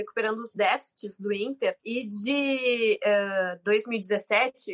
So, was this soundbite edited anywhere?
yes; 1 cut; at 1.8 s

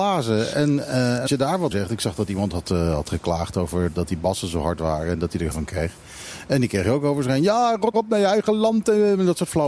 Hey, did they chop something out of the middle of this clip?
yes; 5 cuts; at 1.3 s, 1.7 s, 3.9 s, 5.5 s, 7.9 s

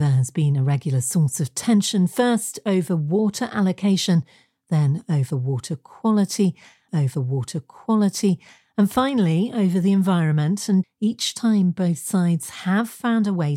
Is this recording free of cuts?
no; 2 cuts; at 6.9 s, 10.8 s

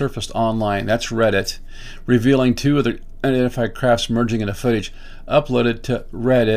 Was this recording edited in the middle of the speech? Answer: no; 0 cuts

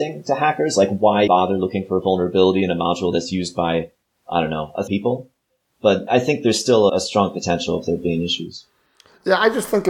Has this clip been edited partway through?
yes; 4 cuts; at 1.3 s, 4.9 s, 6.1 s, 6.9 s

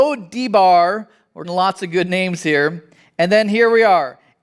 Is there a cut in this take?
yes; 1 cut; at 1.4 s

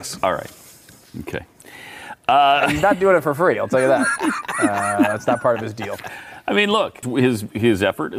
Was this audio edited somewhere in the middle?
yes; 1 cut; at 7.0 s

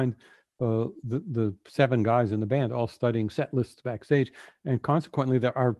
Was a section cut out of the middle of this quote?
no; 0 cuts

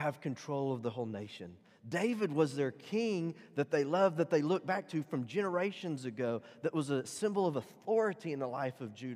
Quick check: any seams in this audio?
no; 0 cuts

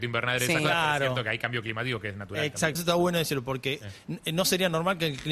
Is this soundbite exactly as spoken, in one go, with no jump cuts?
no; 1 cut; at 2.8 s

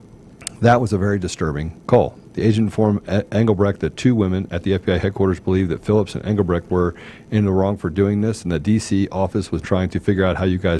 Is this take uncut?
no; 2 cuts; at 2.2 s, 9.6 s

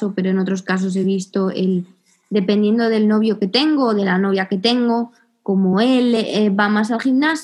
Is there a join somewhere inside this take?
no; 0 cuts

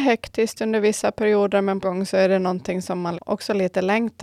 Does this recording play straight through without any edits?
no; 2 cuts; at 1.8 s, 3.1 s

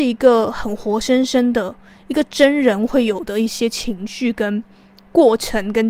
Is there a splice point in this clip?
no; 0 cuts

